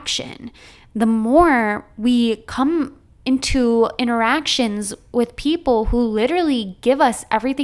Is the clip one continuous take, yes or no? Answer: yes